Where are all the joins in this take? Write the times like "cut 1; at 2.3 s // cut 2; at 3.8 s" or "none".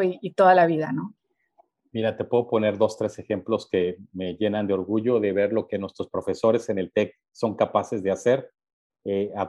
none